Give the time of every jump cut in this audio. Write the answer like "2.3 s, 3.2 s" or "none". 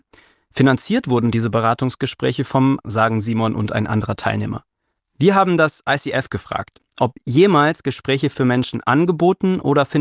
2.8 s